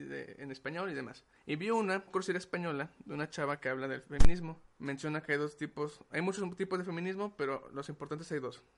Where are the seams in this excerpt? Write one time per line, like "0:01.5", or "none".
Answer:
0:02.1